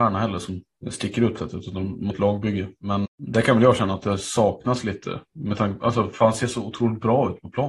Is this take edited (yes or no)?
yes